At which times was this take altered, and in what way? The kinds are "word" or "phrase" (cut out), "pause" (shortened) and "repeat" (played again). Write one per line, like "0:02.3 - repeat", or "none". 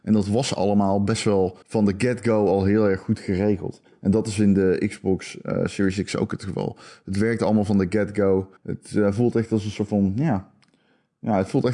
0:01.6 - pause
0:08.6 - pause